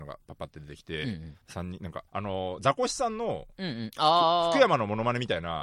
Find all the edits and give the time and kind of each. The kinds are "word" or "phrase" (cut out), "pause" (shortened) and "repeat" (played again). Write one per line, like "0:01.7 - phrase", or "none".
0:01.4 - pause
0:02.1 - pause